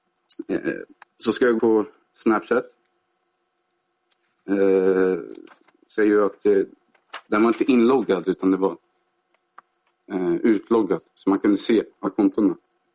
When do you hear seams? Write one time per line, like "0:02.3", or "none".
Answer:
0:01.0
0:01.6
0:06.0
0:07.2
0:11.1
0:12.1